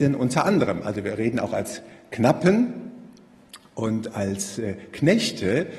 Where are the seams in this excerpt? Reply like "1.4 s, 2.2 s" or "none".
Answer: none